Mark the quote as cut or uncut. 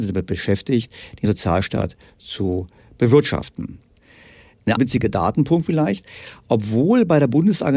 cut